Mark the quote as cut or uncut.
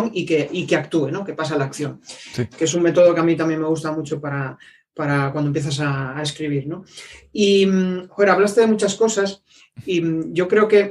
uncut